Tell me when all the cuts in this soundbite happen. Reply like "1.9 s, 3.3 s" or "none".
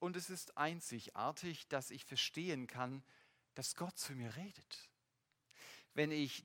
none

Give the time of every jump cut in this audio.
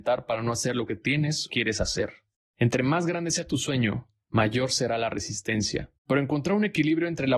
1.5 s, 6.0 s

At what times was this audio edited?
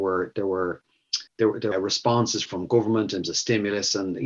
1.3 s, 1.7 s, 2.5 s, 3.2 s

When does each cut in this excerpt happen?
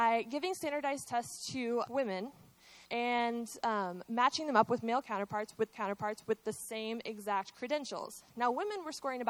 1.9 s, 2.8 s, 5.7 s

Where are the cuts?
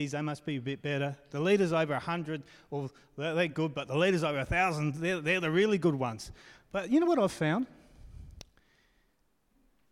none

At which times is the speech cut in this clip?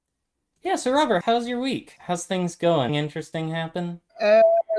1.2 s, 2.0 s, 2.9 s

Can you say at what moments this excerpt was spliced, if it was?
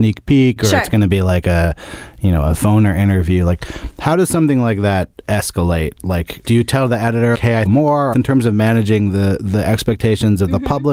6.4 s, 7.3 s, 7.7 s, 8.1 s

